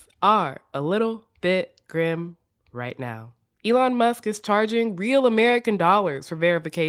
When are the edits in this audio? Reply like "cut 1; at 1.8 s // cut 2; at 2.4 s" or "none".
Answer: none